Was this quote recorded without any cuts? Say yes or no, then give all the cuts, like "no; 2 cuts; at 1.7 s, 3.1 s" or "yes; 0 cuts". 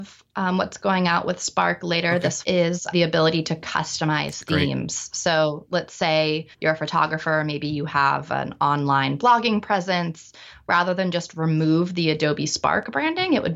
no; 3 cuts; at 2.4 s, 2.9 s, 6.5 s